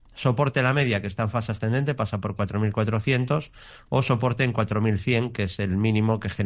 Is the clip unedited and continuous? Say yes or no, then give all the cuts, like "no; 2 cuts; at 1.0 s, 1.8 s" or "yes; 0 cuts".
yes; 0 cuts